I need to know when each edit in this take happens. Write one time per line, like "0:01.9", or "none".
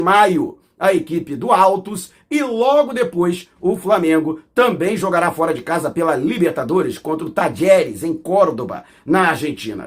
none